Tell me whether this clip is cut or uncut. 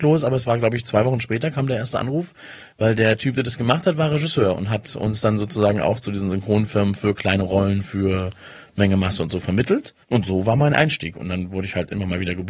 cut